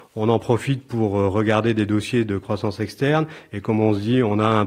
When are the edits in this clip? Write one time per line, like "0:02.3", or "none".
none